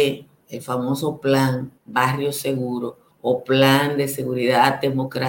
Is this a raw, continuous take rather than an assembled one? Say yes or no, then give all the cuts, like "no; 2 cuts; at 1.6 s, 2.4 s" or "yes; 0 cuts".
no; 2 cuts; at 1.8 s, 3.1 s